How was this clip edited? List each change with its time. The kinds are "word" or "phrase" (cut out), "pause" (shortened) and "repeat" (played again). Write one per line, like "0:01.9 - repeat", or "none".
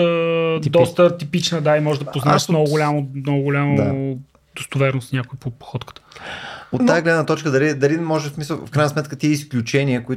none

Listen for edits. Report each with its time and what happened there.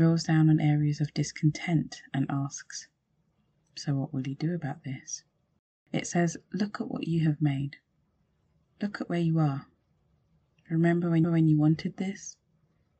0:05.6 - pause
0:11.2 - repeat

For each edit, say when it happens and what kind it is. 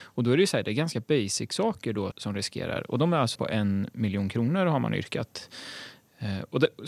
0:02.1 - word
0:03.4 - word

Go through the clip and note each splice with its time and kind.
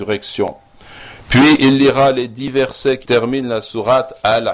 0:03.0 - word

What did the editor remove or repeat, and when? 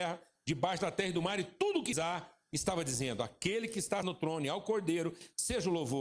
0:01.9 - word
0:04.0 - word

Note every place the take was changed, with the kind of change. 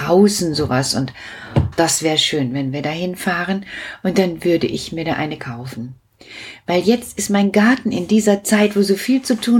0:01.7 - word
0:05.4 - phrase

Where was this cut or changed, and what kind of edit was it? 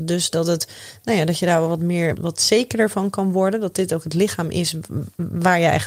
0:02.1 - word

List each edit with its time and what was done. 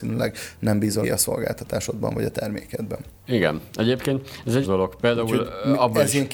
0:01.0 - word
0:04.6 - word

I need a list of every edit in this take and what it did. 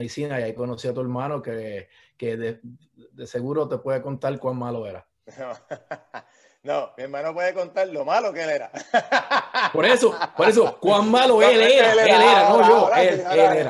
none

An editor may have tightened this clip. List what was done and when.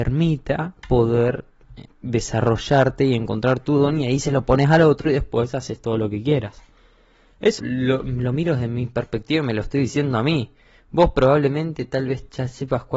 0:01.9 - pause
0:07.6 - word

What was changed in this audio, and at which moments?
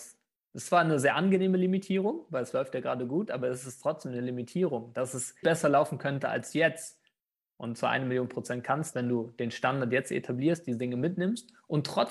0:05.4 - word
0:08.9 - word

